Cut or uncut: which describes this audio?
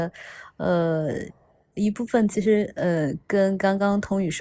uncut